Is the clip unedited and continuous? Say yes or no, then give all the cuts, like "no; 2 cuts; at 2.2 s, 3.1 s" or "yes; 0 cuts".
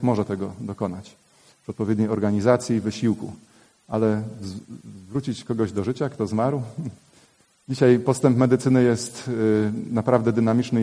yes; 0 cuts